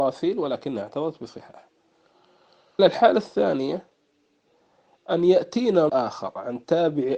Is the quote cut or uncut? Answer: cut